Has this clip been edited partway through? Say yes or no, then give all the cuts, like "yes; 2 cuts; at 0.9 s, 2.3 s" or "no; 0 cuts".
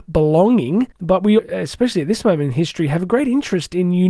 yes; 2 cuts; at 0.9 s, 1.4 s